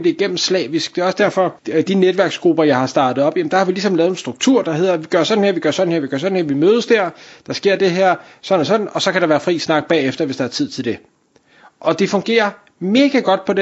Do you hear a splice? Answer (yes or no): yes